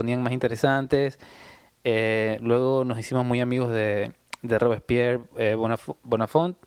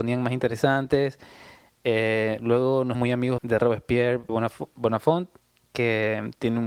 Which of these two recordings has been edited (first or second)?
second